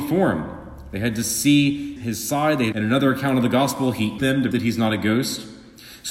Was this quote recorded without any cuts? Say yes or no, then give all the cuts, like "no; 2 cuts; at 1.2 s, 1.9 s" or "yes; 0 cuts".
no; 4 cuts; at 2.0 s, 2.7 s, 4.2 s, 4.5 s